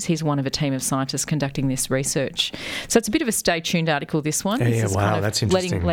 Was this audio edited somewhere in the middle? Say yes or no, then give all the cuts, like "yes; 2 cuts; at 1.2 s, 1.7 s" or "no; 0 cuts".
no; 0 cuts